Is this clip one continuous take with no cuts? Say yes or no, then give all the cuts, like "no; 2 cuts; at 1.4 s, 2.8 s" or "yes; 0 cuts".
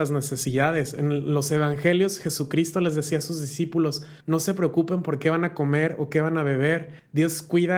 no; 1 cut; at 4.2 s